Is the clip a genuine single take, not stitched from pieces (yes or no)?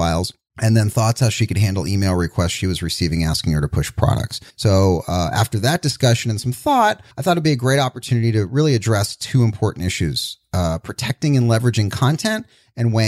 no